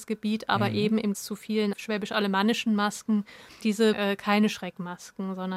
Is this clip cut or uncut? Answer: cut